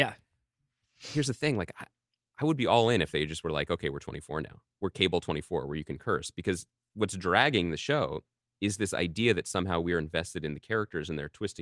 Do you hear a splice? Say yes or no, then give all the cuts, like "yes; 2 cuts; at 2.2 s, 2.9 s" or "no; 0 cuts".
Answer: no; 0 cuts